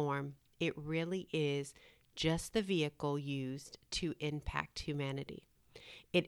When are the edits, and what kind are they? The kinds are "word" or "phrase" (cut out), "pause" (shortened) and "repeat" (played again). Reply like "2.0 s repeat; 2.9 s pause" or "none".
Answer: none